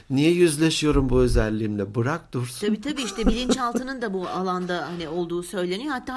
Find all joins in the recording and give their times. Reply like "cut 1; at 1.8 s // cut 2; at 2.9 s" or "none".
none